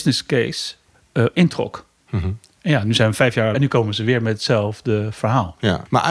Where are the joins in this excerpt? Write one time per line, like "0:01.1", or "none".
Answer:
0:00.9
0:03.5